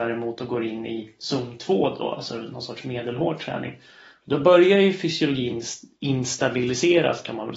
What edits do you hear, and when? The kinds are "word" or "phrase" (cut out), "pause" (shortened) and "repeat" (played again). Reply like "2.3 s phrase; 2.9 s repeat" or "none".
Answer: none